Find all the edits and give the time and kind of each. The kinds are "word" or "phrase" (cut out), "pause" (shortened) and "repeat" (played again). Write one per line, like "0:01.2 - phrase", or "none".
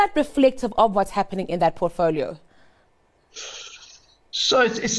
none